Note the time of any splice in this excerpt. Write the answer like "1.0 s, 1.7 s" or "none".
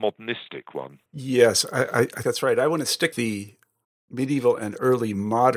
1.1 s, 2.2 s, 3.1 s, 3.8 s